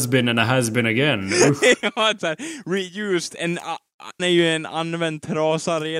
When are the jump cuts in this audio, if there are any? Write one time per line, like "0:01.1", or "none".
0:02.2
0:04.2

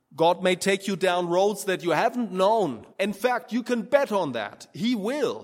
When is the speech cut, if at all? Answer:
0:02.9

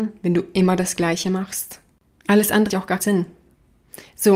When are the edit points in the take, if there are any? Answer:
0:02.7
0:03.0

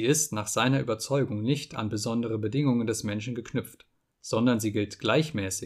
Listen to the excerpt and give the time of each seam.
none

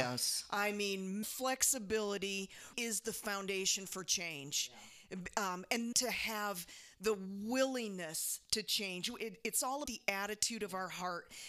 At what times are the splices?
0:01.2
0:02.7
0:05.9
0:09.9

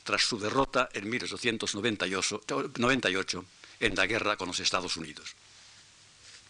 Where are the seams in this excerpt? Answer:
0:03.7

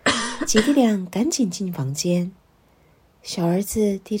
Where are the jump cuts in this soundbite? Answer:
none

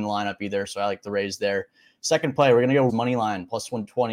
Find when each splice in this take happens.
0:02.9

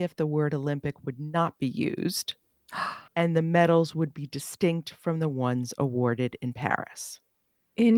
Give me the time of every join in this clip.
0:03.1

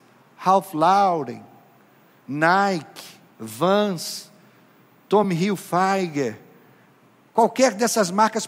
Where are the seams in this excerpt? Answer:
none

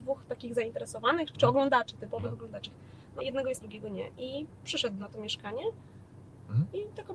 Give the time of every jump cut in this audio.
0:01.3
0:03.2
0:03.6
0:05.0

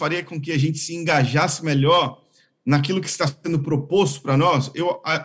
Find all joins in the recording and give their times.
none

